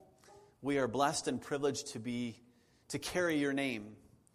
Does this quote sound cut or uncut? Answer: uncut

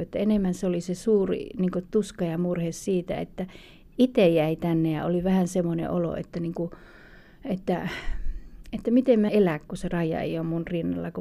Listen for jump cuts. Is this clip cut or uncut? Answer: cut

